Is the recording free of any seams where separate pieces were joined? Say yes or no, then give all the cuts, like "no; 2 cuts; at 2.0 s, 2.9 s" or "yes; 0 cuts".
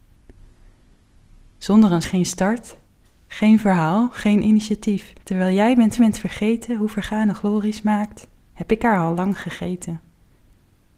no; 3 cuts; at 2.0 s, 5.2 s, 6.0 s